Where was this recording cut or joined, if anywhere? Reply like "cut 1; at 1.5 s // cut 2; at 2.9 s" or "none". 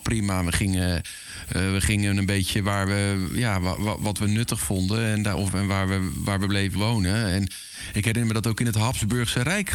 cut 1; at 6.8 s